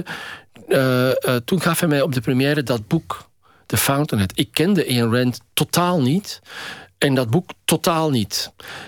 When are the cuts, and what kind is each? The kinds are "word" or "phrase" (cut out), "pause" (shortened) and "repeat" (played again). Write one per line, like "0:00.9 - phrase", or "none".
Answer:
none